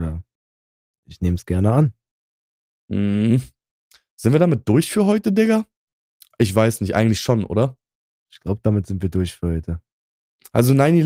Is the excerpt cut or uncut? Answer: uncut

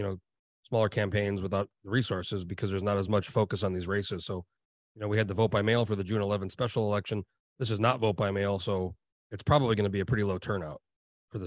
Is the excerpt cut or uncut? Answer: uncut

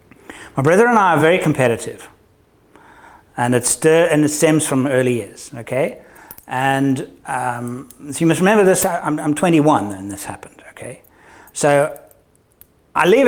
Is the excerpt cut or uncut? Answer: uncut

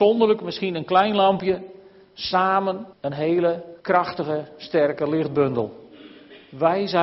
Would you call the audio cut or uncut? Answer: cut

